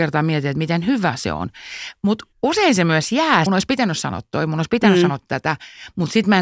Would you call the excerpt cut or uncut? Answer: cut